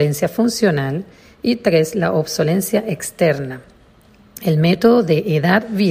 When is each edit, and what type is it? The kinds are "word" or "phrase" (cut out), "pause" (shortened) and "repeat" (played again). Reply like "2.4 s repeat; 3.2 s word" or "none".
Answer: none